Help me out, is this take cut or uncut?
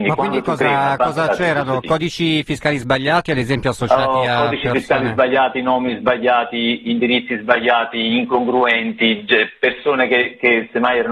uncut